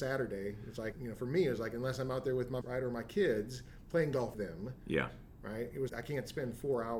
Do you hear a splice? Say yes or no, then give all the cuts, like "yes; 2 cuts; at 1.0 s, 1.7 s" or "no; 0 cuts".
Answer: yes; 4 cuts; at 0.9 s, 2.6 s, 4.3 s, 5.9 s